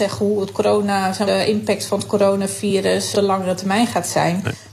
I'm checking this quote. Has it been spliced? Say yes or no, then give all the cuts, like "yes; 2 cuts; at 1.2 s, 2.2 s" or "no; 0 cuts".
yes; 2 cuts; at 1.3 s, 3.1 s